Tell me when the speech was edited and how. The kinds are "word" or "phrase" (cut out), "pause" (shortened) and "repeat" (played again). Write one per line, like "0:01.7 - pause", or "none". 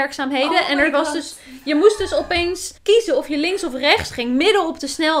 0:02.8 - pause